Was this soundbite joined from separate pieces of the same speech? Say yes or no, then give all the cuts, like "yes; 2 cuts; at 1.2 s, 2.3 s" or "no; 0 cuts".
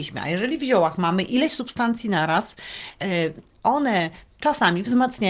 no; 0 cuts